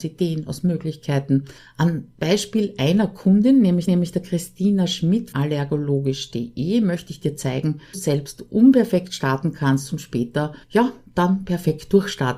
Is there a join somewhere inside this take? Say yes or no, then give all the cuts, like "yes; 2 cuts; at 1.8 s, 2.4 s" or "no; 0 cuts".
yes; 5 cuts; at 1.6 s, 3.9 s, 5.3 s, 7.9 s, 10.6 s